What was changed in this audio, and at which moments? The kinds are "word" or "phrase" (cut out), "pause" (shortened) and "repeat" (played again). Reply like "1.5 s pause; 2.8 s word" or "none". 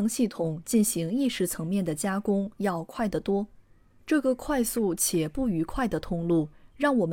none